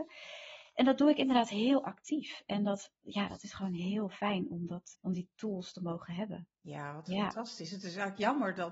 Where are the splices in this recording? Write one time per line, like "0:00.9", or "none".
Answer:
0:04.9
0:06.5